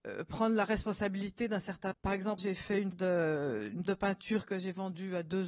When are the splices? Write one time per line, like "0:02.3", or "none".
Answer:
0:01.9
0:02.4
0:02.9
0:03.9